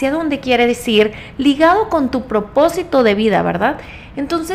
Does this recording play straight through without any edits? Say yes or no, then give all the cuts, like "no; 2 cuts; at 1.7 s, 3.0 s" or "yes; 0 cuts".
yes; 0 cuts